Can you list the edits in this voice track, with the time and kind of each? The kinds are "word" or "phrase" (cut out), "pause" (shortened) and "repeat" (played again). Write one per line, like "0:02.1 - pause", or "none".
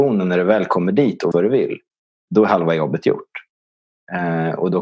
0:01.3 - word